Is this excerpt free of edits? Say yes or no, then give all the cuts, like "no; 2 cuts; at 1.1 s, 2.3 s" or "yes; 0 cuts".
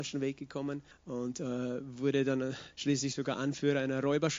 no; 2 cuts; at 0.9 s, 2.7 s